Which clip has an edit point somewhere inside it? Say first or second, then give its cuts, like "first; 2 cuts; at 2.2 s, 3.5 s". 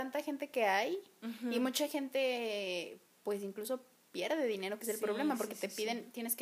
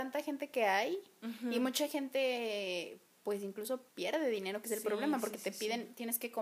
second; 1 cut; at 3.9 s